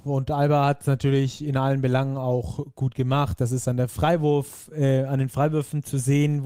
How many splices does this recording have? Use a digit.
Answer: 0